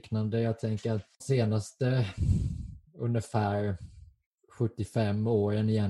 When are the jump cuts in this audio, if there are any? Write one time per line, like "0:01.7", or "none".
0:01.2
0:02.9